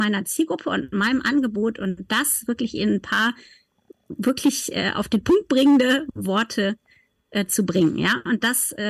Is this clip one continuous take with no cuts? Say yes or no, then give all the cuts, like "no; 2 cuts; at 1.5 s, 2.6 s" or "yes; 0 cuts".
yes; 0 cuts